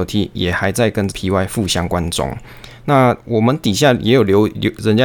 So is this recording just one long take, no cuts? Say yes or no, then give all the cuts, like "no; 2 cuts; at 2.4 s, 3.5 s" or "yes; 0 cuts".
no; 1 cut; at 1.1 s